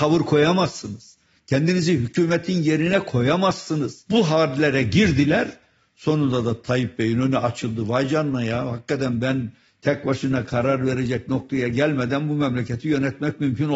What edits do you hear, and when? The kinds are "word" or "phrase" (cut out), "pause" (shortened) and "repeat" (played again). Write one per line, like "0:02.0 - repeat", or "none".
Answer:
none